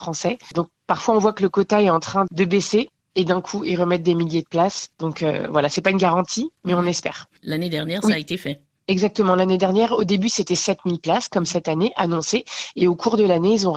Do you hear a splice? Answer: no; 0 cuts

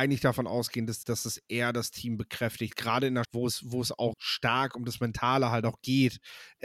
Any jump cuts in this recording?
yes; 3 cuts; at 1.0 s, 3.2 s, 4.1 s

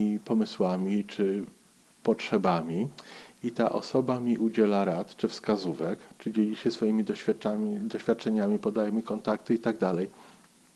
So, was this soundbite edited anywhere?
no; 0 cuts

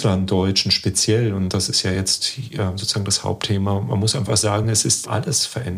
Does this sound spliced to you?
no; 0 cuts

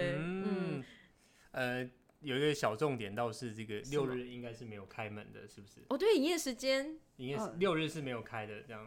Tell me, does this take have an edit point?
no; 0 cuts

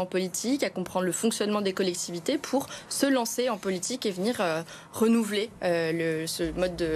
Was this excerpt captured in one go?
yes; 0 cuts

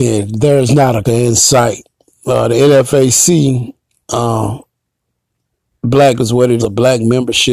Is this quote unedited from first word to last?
no; 3 cuts; at 1.0 s, 6.2 s, 6.6 s

